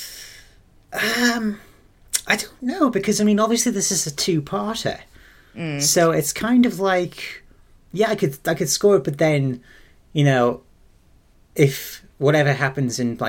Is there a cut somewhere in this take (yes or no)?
no